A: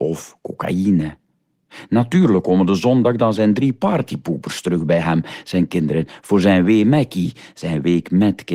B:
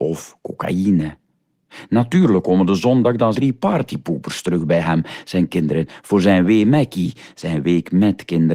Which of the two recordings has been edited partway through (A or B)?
B